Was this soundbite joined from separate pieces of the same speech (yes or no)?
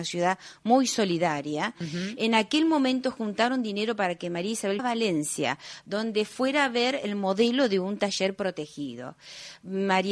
yes